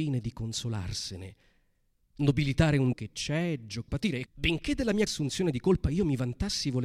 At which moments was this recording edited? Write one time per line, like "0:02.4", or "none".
0:02.9
0:03.9
0:04.3
0:05.1